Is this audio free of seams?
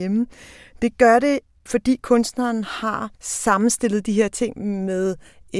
no; 1 cut; at 3.1 s

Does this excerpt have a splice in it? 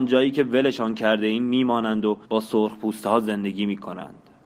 yes; 1 cut; at 2.3 s

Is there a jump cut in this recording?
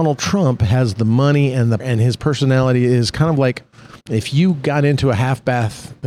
yes; 2 cuts; at 1.8 s, 4.0 s

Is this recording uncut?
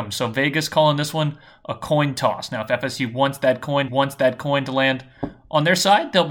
no; 1 cut; at 3.9 s

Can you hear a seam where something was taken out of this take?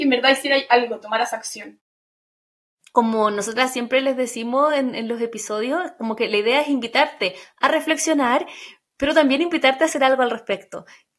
no; 0 cuts

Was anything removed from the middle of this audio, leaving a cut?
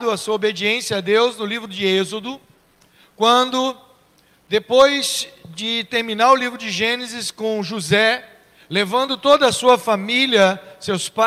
no; 0 cuts

